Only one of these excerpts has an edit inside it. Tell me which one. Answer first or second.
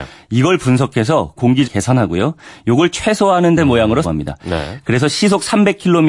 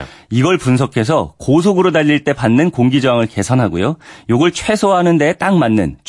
first